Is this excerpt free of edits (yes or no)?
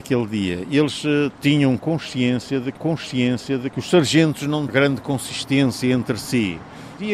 no